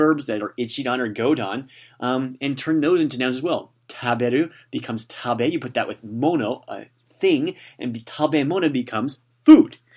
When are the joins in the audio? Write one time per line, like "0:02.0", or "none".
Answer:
none

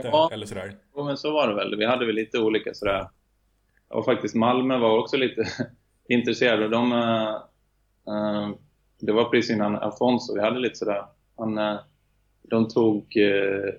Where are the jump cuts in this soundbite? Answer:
none

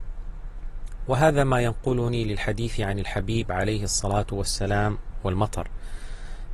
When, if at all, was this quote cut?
none

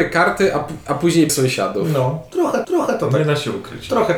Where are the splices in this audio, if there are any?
0:01.3
0:02.6

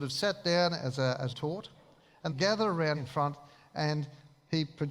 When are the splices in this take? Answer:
0:01.3
0:02.3
0:02.9

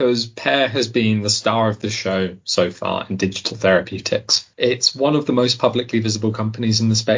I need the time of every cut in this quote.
0:04.5

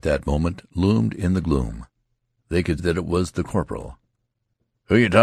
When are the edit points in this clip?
0:02.8

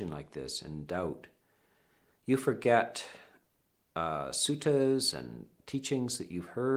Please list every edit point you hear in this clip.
none

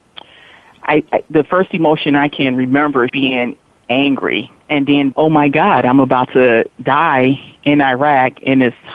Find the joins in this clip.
0:03.1
0:04.6
0:05.1

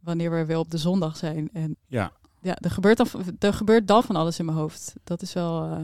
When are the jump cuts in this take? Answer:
0:01.7
0:04.0

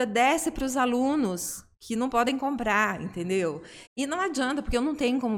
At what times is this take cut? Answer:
0:01.7
0:03.9

